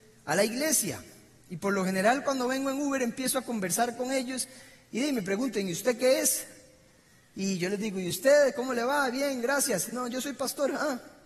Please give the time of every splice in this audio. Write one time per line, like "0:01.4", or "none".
none